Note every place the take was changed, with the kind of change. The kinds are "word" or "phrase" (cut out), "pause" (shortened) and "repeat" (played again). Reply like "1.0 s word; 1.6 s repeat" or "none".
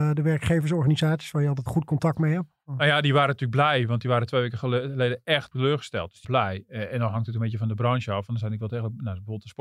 1.7 s word; 5.5 s word; 6.2 s phrase